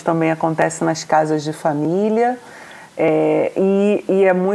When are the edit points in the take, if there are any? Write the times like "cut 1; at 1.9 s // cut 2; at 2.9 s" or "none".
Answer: none